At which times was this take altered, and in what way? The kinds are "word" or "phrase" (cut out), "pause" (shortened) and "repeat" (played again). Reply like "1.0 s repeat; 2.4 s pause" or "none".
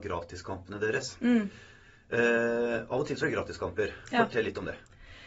3.2 s word